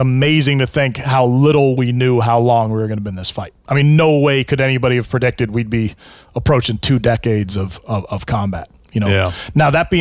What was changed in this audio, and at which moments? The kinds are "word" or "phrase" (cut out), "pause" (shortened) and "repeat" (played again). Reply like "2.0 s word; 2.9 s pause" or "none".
none